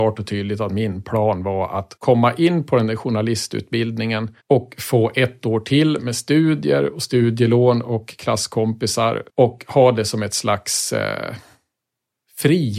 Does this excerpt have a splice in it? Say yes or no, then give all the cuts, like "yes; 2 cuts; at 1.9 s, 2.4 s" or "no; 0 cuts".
yes; 3 cuts; at 2.0 s, 4.4 s, 9.3 s